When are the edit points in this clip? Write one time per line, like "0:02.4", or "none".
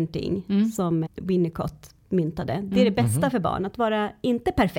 0:01.1